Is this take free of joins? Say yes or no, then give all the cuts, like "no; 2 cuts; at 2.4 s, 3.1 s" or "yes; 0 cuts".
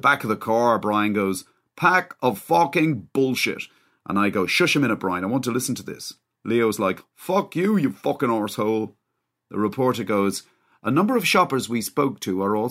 yes; 0 cuts